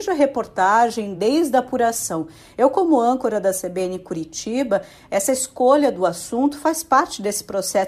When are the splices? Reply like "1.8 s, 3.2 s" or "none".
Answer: none